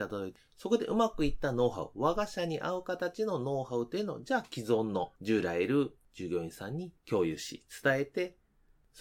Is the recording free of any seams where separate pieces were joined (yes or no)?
no